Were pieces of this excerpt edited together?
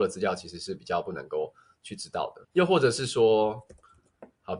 yes; 1 cut; at 2.4 s

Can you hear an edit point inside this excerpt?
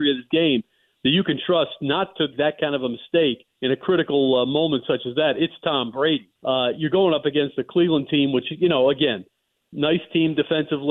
yes; 3 cuts; at 2.3 s, 3.5 s, 6.4 s

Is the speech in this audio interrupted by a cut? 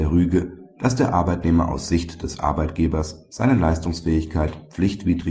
no; 0 cuts

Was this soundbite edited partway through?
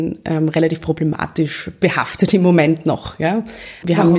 no; 0 cuts

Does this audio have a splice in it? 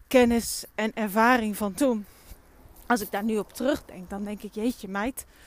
no; 0 cuts

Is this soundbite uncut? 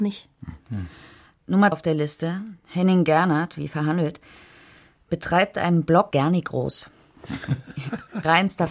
no; 2 cuts; at 1.7 s, 6.1 s

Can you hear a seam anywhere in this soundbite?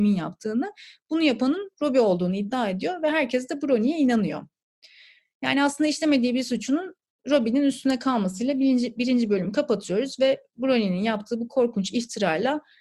no; 0 cuts

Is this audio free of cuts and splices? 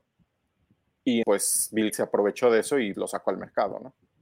no; 3 cuts; at 1.2 s, 1.9 s, 2.9 s

